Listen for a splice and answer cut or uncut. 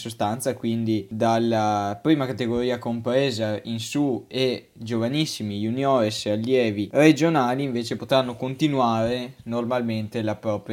uncut